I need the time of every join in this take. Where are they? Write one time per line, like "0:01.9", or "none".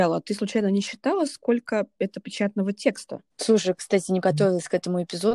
0:02.2
0:03.3
0:04.2